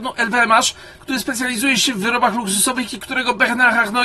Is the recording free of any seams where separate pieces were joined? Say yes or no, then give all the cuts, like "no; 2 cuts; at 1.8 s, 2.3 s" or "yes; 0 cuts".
yes; 0 cuts